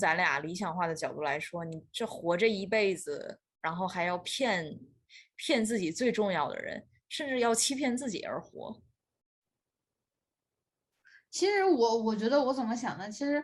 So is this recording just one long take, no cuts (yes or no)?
yes